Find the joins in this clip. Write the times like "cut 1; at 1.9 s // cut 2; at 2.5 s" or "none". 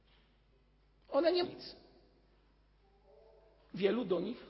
cut 1; at 1.4 s